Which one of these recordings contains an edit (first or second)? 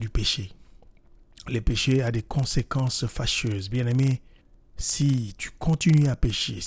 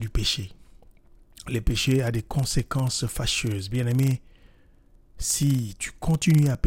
first